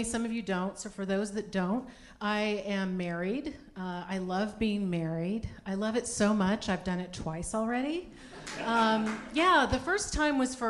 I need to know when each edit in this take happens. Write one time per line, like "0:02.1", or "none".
none

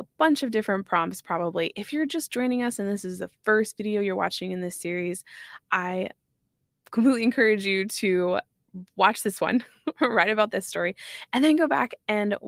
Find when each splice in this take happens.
none

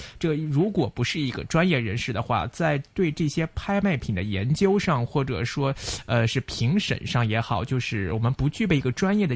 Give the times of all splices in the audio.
none

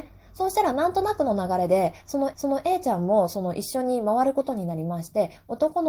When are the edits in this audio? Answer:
0:02.3

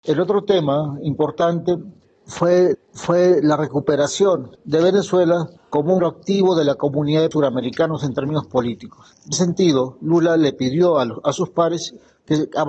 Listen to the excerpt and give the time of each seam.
0:02.7
0:04.5
0:05.6
0:06.0
0:07.3
0:09.3

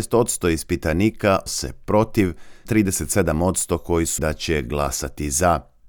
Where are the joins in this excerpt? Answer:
0:01.5
0:02.7
0:04.2

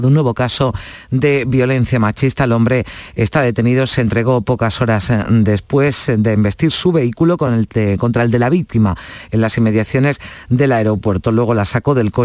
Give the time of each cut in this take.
none

